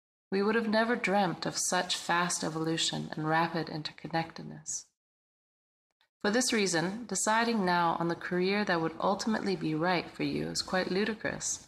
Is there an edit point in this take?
no; 0 cuts

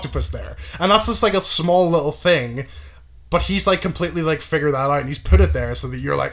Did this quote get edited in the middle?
no; 0 cuts

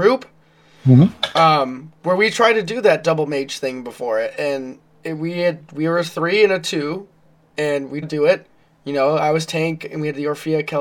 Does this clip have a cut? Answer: yes; 1 cut; at 8.0 s

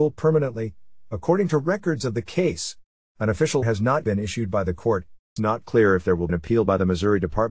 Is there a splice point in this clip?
yes; 4 cuts; at 3.6 s, 4.0 s, 5.4 s, 6.3 s

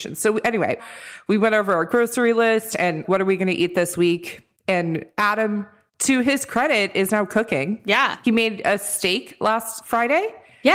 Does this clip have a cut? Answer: no; 0 cuts

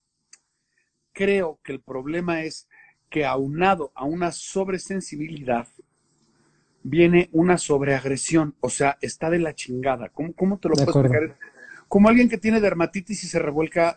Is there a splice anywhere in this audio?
no; 0 cuts

